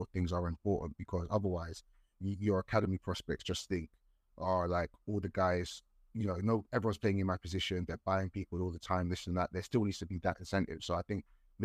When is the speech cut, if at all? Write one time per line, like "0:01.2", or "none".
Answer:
none